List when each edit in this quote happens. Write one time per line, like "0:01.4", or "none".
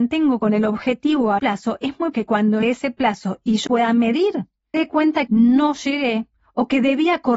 0:01.4
0:02.1
0:02.6
0:03.7
0:04.7
0:05.3